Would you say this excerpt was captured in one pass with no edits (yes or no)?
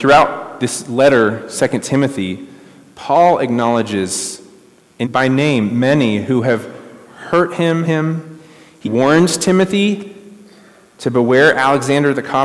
no